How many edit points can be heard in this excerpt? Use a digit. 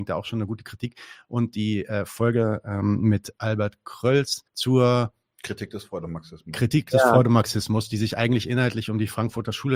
1